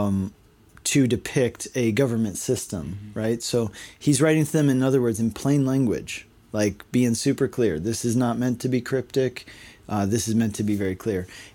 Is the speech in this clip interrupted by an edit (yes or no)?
no